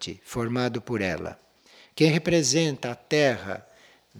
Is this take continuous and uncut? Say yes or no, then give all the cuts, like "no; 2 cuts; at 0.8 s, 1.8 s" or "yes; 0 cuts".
yes; 0 cuts